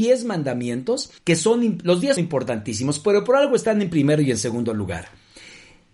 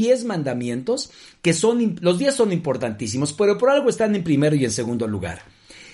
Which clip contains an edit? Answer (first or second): first